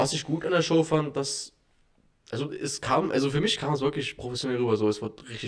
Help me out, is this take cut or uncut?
uncut